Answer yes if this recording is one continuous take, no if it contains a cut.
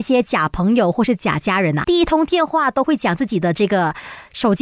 no